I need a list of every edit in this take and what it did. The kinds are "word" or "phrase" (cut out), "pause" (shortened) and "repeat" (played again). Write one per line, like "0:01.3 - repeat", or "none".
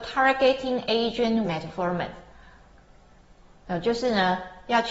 0:01.4 - word